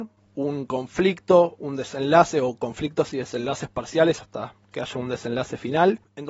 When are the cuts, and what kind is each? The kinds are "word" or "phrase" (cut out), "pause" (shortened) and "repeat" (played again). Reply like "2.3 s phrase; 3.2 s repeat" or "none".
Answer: none